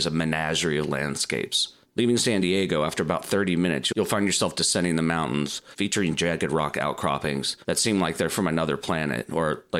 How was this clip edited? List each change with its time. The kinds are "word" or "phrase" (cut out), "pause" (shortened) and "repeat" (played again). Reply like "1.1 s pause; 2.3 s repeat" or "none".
none